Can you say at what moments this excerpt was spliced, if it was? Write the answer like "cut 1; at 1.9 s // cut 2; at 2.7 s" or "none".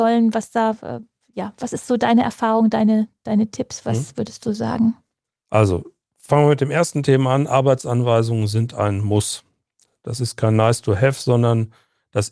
none